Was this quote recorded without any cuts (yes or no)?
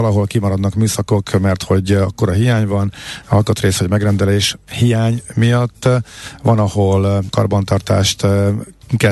no